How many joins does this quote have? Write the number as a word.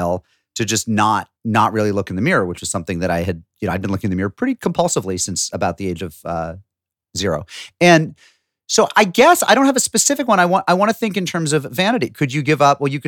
one